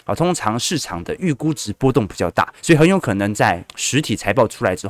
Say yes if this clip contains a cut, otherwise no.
yes